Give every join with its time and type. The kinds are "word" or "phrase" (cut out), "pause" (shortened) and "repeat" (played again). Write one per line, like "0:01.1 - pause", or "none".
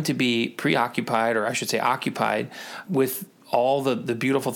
0:02.9 - word